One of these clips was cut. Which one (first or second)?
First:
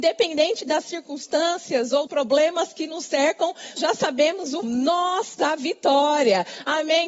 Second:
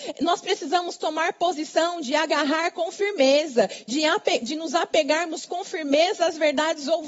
first